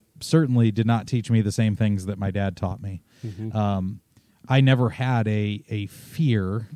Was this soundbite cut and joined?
no; 0 cuts

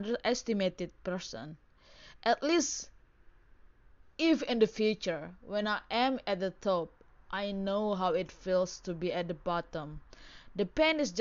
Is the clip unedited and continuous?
yes; 0 cuts

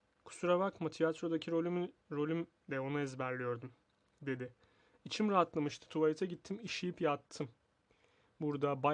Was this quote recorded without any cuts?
yes; 0 cuts

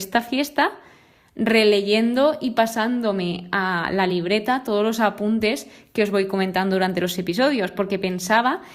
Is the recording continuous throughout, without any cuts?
yes; 0 cuts

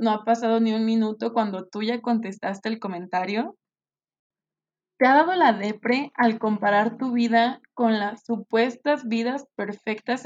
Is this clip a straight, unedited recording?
yes; 0 cuts

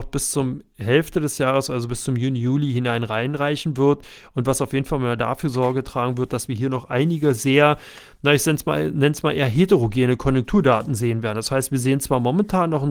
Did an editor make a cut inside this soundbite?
no; 0 cuts

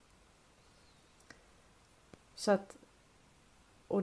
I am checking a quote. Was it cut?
no; 0 cuts

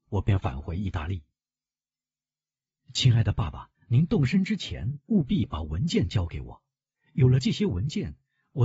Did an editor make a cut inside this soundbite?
yes; 2 cuts; at 3.7 s, 5.1 s

